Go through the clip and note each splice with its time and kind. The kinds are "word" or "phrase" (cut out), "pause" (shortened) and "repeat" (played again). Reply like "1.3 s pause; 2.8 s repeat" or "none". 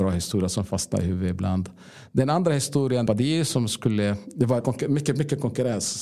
3.1 s phrase; 4.6 s phrase